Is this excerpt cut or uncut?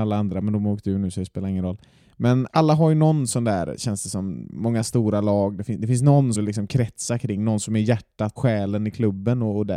cut